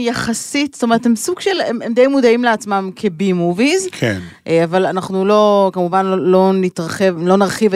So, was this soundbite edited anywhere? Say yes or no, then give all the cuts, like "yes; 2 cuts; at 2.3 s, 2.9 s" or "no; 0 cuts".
no; 0 cuts